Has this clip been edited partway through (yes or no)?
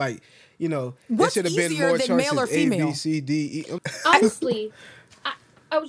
yes